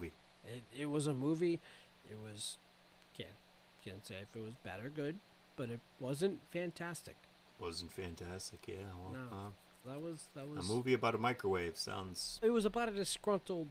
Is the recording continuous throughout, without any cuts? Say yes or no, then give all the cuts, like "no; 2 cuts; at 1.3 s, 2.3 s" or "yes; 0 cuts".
no; 2 cuts; at 9.8 s, 12.4 s